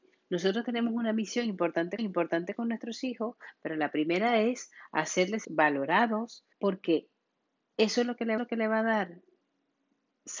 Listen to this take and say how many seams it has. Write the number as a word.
four